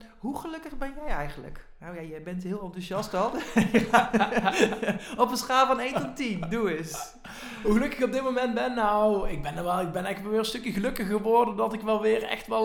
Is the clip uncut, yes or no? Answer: yes